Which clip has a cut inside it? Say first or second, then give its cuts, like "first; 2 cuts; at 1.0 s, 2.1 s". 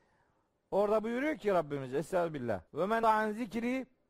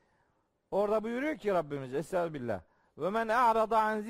first; 2 cuts; at 2.7 s, 3.0 s